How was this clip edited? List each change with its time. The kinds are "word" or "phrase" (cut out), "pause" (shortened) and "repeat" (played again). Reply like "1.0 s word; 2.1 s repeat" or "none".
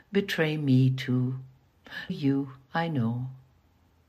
2.1 s phrase